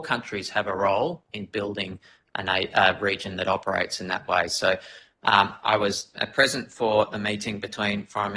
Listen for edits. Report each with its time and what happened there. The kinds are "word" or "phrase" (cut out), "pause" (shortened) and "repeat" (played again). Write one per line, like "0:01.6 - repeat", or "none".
none